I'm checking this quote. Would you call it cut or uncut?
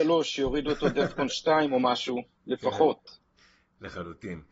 uncut